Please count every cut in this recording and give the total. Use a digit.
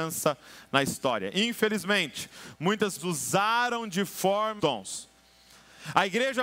2